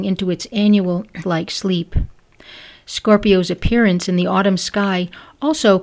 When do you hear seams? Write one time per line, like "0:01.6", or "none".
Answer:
0:01.2